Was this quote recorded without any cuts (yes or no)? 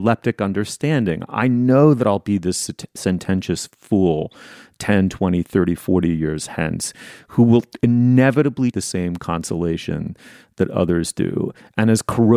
no